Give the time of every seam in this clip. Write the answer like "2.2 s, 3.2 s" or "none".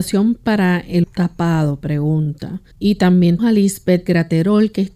1.0 s, 2.7 s, 3.4 s, 4.1 s